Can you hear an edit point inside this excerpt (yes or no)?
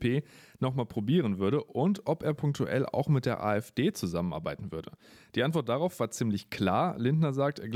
no